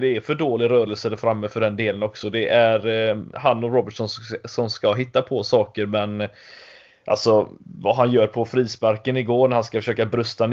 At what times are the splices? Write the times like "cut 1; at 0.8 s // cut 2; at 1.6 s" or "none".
cut 1; at 7.6 s